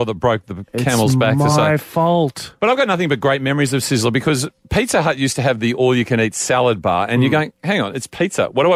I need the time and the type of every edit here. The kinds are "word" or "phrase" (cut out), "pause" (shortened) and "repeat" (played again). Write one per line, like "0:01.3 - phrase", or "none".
none